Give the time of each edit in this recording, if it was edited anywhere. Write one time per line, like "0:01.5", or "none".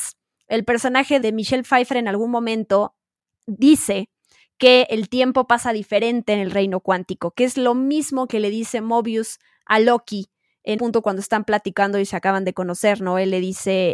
0:01.2
0:10.8